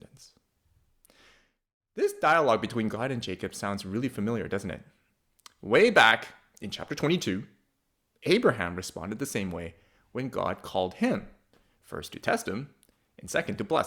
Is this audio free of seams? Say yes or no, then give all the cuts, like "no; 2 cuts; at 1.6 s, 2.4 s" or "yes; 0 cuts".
yes; 0 cuts